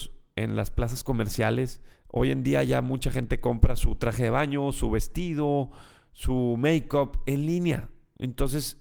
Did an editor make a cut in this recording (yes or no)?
yes